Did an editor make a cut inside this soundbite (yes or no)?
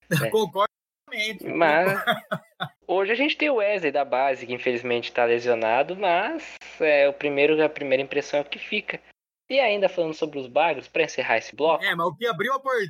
yes